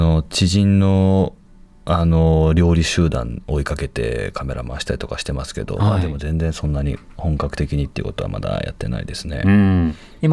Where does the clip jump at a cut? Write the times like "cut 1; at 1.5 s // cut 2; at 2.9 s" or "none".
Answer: none